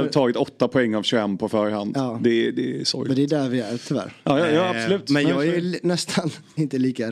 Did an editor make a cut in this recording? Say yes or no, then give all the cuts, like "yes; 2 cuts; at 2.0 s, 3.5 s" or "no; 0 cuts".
no; 0 cuts